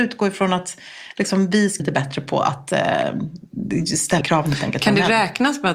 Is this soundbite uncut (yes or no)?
no